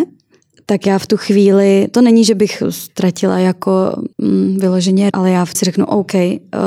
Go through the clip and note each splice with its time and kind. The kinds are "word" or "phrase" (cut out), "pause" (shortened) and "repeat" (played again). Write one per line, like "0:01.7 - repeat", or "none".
0:04.1 - pause
0:05.1 - word
0:05.5 - phrase

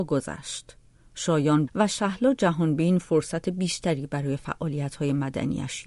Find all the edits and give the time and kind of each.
0:01.7 - phrase

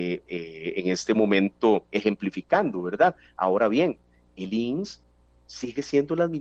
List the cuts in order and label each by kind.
0:01.9 - pause

